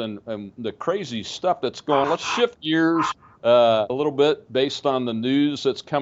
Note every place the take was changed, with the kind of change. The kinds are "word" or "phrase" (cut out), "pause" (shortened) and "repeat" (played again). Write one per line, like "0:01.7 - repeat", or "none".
0:02.0 - word
0:03.9 - word